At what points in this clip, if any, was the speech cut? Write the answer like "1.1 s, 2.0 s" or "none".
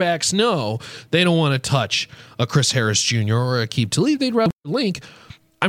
none